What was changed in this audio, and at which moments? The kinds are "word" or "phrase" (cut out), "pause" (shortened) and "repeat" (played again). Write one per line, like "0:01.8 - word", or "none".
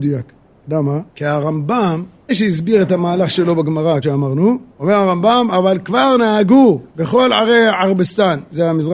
0:01.1 - pause
0:02.3 - word
0:04.0 - word
0:04.7 - pause
0:06.9 - pause